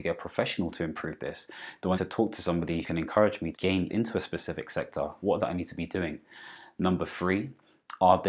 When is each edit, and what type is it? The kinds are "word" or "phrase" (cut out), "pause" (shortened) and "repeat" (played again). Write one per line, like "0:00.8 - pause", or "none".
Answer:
0:01.9 - word
0:02.8 - word
0:03.5 - word
0:03.9 - word
0:05.4 - phrase